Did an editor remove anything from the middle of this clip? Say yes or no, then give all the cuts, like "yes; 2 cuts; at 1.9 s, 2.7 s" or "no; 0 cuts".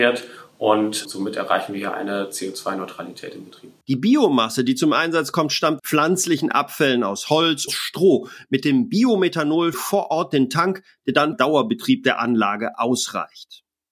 yes; 6 cuts; at 1.0 s, 3.8 s, 5.8 s, 7.7 s, 9.7 s, 11.3 s